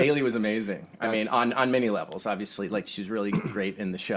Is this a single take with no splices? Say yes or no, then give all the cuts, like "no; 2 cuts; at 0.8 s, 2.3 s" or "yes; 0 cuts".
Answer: yes; 0 cuts